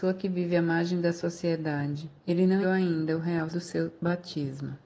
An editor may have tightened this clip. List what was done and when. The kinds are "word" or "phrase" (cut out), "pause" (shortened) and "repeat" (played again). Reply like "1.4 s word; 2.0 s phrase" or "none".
2.2 s pause; 2.6 s word; 3.5 s word